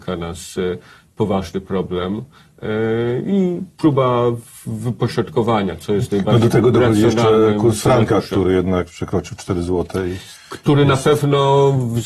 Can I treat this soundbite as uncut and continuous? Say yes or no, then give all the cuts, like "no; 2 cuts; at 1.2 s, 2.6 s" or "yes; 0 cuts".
yes; 0 cuts